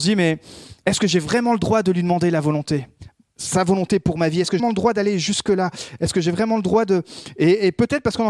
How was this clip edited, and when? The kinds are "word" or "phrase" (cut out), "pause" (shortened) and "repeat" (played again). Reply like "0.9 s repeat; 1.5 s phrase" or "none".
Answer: 4.6 s word